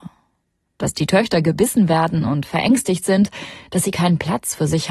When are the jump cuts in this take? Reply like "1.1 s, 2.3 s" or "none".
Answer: none